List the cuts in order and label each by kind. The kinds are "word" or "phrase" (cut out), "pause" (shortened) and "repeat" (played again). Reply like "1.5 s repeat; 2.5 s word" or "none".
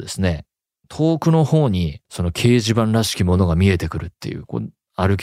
2.0 s pause